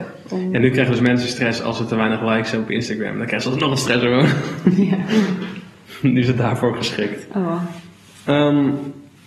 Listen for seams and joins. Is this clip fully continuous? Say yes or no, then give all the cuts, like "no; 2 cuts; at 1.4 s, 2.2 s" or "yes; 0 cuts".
yes; 0 cuts